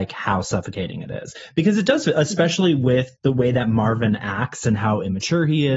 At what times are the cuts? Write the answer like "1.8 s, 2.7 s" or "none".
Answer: 3.2 s